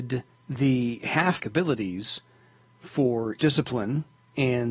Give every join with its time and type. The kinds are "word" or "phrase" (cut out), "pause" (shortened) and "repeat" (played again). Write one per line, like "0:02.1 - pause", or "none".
0:01.4 - word
0:03.4 - word